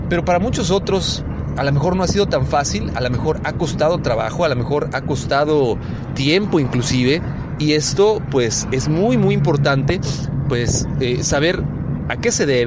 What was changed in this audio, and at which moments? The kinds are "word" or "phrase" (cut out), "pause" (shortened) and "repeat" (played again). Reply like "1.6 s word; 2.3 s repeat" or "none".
none